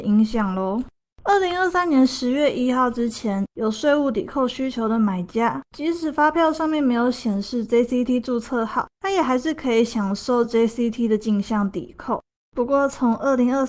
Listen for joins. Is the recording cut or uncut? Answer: uncut